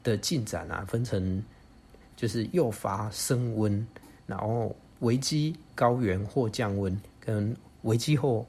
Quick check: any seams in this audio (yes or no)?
yes